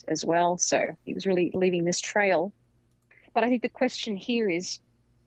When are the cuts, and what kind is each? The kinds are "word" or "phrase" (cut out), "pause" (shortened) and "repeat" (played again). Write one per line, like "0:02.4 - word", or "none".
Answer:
none